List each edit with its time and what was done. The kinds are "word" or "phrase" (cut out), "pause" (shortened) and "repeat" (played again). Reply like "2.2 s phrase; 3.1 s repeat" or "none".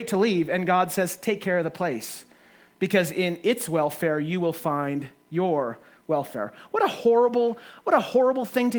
none